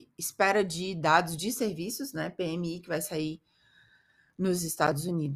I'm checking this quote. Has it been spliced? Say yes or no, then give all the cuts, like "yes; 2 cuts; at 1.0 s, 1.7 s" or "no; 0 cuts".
no; 0 cuts